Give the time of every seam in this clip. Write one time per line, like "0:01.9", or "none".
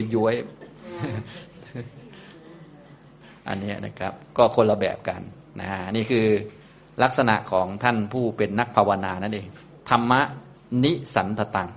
none